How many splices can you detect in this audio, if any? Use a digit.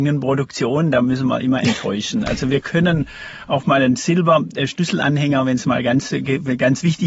0